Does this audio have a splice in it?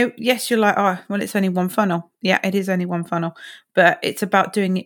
no; 0 cuts

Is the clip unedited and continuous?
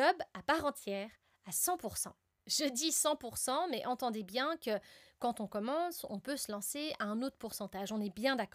yes; 0 cuts

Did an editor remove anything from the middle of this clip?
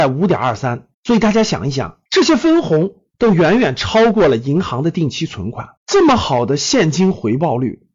yes; 3 cuts; at 0.9 s, 2.1 s, 5.8 s

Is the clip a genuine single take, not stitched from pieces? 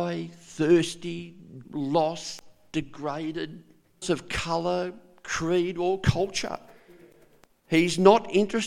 no; 2 cuts; at 1.6 s, 4.0 s

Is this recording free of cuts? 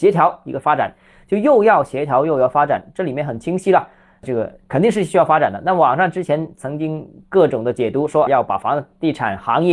no; 1 cut; at 8.3 s

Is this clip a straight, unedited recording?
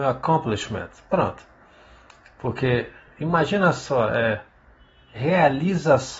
yes; 0 cuts

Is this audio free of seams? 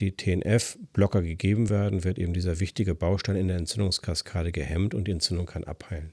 yes; 0 cuts

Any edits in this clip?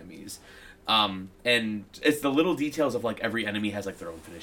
yes; 1 cut; at 1.3 s

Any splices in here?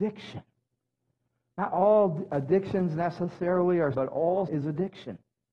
yes; 2 cuts; at 3.9 s, 4.5 s

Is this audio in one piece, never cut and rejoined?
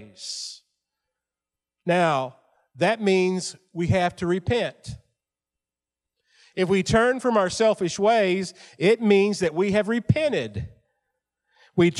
yes; 0 cuts

